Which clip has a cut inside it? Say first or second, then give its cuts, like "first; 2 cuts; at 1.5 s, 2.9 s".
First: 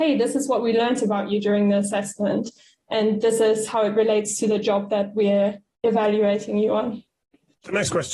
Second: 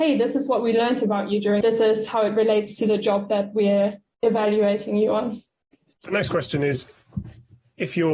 second; 1 cut; at 1.6 s